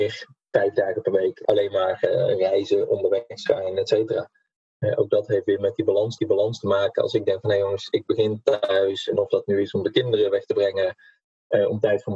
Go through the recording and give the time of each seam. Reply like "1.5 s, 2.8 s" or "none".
6.2 s